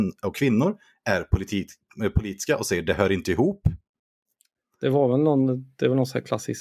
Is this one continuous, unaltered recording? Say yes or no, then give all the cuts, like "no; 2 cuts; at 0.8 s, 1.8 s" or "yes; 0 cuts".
yes; 0 cuts